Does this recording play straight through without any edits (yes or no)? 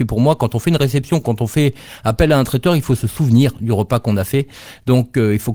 yes